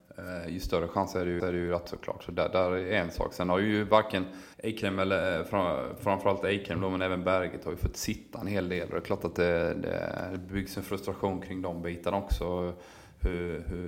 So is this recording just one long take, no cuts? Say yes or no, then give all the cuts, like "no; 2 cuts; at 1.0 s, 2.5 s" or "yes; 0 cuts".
no; 3 cuts; at 1.4 s, 1.9 s, 4.5 s